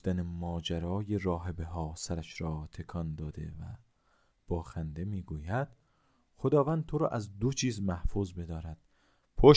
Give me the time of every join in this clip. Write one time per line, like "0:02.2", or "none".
none